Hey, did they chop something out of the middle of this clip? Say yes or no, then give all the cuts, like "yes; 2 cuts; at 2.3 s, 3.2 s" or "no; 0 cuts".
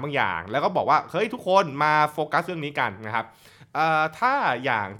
no; 0 cuts